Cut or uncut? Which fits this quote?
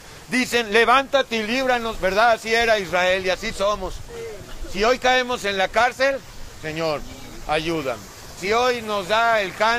uncut